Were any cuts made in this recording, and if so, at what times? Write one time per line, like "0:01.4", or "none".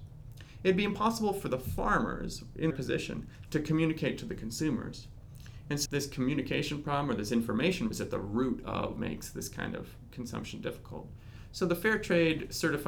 0:02.7
0:05.8
0:07.9
0:09.0